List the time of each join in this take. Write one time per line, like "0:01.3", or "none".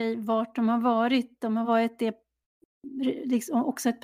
none